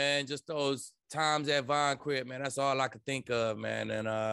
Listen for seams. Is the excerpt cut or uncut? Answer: cut